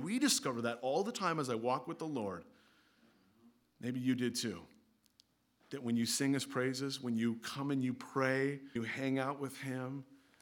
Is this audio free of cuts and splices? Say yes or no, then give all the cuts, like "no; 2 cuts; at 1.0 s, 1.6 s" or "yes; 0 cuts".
no; 1 cut; at 8.8 s